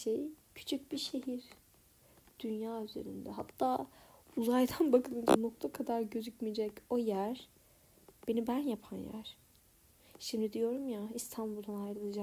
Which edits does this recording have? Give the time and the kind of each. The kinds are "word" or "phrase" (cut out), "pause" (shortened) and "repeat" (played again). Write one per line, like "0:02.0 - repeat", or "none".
none